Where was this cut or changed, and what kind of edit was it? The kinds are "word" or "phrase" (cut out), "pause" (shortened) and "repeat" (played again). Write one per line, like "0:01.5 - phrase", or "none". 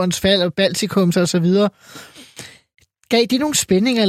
0:01.1 - word